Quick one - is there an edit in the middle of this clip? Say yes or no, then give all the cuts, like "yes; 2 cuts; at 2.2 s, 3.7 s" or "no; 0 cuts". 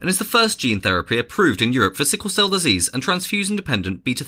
no; 0 cuts